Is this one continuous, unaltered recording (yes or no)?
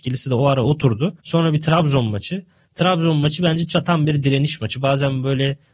no